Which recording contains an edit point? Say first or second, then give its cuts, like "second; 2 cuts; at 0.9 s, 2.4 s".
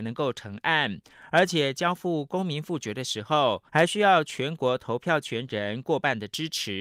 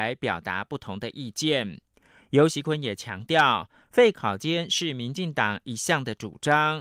first; 1 cut; at 3.7 s